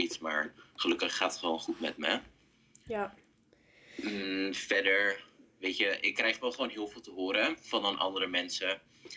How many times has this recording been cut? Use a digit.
0